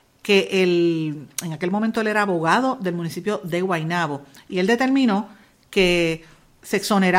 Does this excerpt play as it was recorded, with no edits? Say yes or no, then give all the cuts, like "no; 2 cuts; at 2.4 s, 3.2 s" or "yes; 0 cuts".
yes; 0 cuts